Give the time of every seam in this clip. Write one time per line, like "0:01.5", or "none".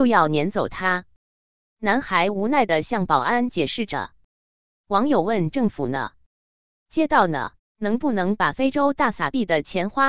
0:07.6

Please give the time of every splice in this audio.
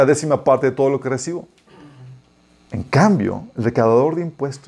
none

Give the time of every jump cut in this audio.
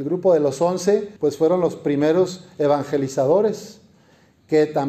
0:01.2

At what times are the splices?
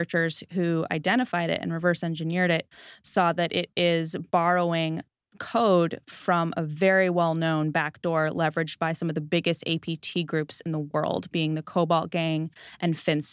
none

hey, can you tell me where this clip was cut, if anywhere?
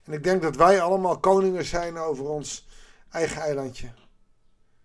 none

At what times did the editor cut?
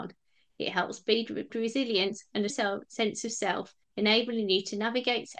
0:01.5
0:02.5
0:03.8

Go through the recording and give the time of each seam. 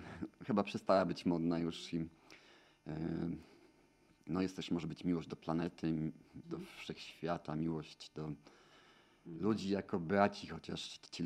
0:06.4

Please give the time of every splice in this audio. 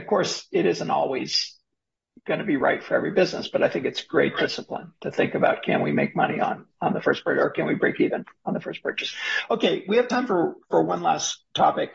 none

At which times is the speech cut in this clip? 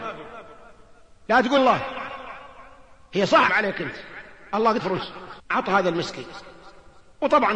0:01.6
0:03.5
0:04.8
0:05.4

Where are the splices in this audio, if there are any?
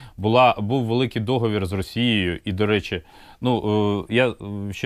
none

